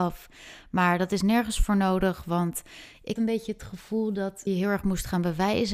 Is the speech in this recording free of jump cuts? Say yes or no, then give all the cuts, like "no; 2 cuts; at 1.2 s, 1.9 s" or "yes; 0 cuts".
no; 2 cuts; at 3.2 s, 4.5 s